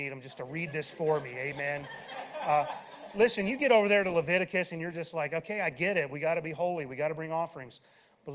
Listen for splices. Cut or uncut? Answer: uncut